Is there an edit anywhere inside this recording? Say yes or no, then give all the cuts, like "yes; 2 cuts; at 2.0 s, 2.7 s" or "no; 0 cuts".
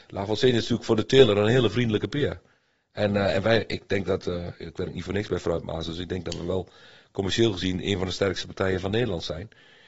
no; 0 cuts